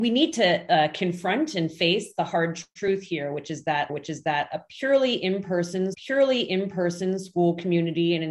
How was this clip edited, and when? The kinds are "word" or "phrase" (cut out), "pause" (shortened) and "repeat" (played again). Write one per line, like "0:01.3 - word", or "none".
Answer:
0:03.9 - repeat
0:05.9 - repeat